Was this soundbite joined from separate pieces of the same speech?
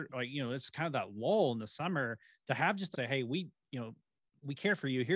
yes; 1 cut; at 2.9 s

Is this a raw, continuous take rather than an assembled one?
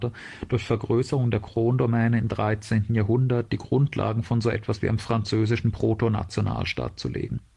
yes; 0 cuts

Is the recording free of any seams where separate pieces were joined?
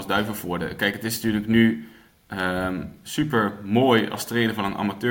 yes; 0 cuts

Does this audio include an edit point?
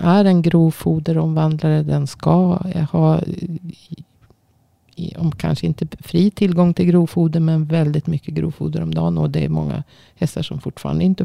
no; 0 cuts

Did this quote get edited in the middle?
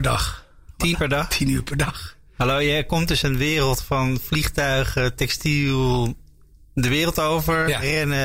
yes; 3 cuts; at 0.9 s, 1.3 s, 3.2 s

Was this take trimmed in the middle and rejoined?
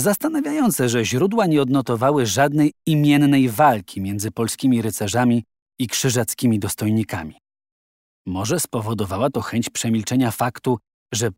no; 0 cuts

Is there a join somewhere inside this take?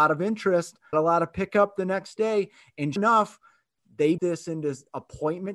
yes; 3 cuts; at 0.9 s, 3.0 s, 4.2 s

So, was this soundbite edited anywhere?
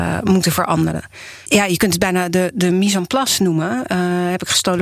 no; 0 cuts

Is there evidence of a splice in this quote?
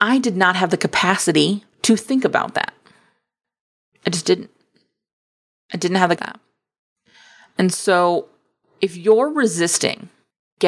yes; 2 cuts; at 1.7 s, 6.2 s

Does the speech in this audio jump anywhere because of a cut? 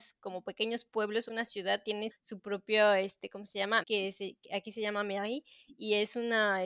yes; 3 cuts; at 1.3 s, 2.1 s, 3.8 s

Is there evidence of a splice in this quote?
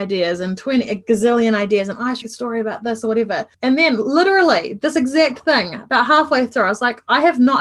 yes; 2 cuts; at 2.2 s, 3.5 s

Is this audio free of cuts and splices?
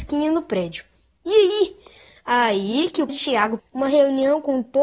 no; 2 cuts; at 3.1 s, 3.6 s

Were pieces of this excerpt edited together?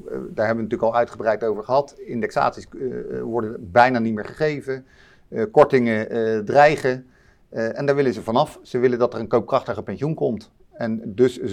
no; 0 cuts

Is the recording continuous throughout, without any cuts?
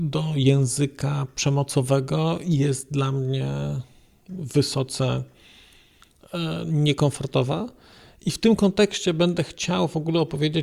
yes; 0 cuts

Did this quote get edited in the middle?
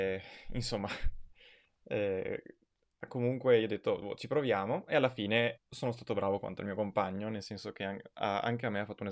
yes; 1 cut; at 5.6 s

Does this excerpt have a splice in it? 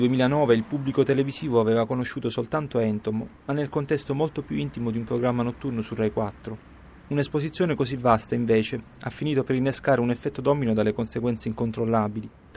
no; 0 cuts

